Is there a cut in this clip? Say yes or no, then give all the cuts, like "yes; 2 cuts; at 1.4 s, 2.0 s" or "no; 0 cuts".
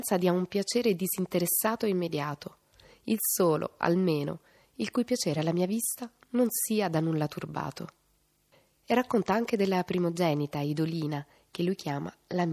no; 0 cuts